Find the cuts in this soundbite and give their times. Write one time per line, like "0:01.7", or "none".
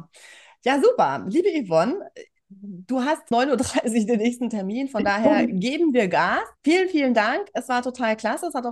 0:03.3
0:06.6

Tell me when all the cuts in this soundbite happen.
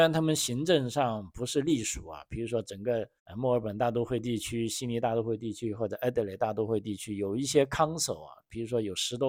0:03.2

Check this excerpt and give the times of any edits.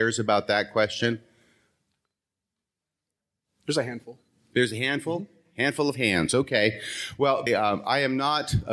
0:07.5

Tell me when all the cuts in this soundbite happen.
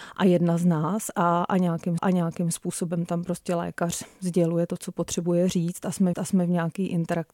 0:02.0
0:06.1

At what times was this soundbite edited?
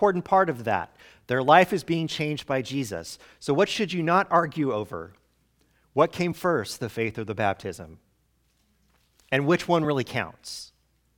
none

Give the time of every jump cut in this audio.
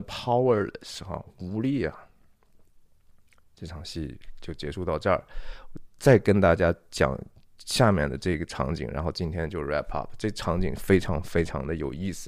none

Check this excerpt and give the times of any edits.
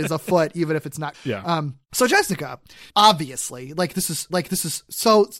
0:01.1
0:01.8
0:02.9
0:04.3

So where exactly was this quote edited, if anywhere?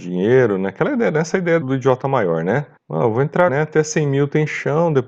0:01.6
0:02.8
0:03.5

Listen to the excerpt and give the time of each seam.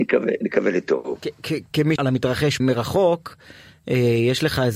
0:02.0
0:02.6

